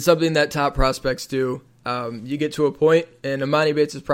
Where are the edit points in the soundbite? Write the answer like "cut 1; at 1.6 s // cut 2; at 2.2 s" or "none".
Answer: none